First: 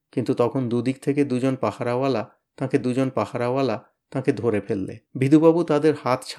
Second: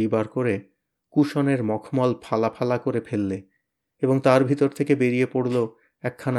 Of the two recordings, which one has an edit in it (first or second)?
first